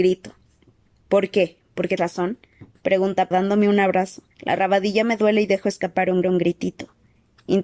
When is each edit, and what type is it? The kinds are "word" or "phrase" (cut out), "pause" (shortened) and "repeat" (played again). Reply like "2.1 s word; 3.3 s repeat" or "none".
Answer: 2.0 s word; 3.3 s word; 4.3 s pause; 6.2 s repeat